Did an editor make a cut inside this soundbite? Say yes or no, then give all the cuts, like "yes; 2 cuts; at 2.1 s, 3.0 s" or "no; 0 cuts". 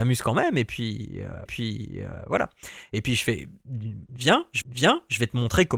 yes; 2 cuts; at 1.5 s, 4.6 s